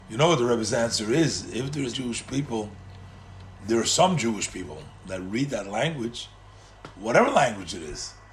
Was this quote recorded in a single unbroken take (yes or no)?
no